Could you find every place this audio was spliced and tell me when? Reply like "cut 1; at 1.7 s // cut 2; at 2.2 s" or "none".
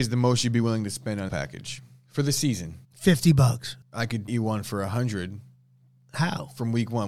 cut 1; at 1.3 s // cut 2; at 2.8 s // cut 3; at 3.8 s // cut 4; at 4.3 s